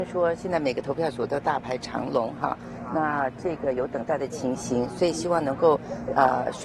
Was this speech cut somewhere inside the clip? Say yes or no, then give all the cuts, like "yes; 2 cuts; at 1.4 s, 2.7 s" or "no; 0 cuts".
no; 0 cuts